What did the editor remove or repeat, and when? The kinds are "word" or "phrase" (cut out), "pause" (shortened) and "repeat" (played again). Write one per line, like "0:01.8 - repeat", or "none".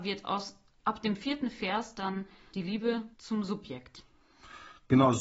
0:02.5 - word
0:03.1 - pause